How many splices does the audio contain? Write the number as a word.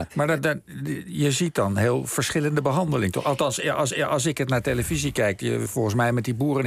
two